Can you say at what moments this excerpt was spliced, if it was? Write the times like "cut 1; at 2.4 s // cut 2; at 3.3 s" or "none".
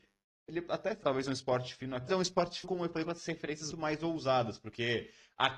cut 1; at 1.0 s // cut 2; at 2.1 s // cut 3; at 2.6 s // cut 4; at 3.7 s